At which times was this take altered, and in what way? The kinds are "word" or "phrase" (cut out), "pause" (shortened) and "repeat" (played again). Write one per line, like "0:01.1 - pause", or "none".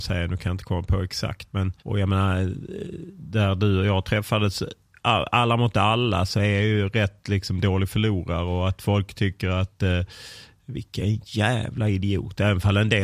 0:01.8 - pause